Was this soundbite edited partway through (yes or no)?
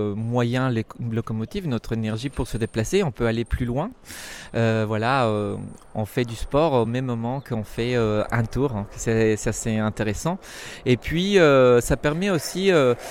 no